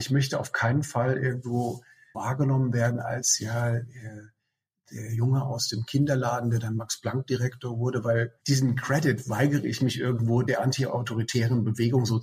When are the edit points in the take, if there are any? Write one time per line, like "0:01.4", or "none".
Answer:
0:02.1
0:08.4